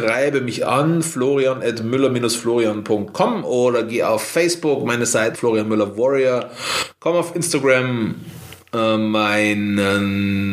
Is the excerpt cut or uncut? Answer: cut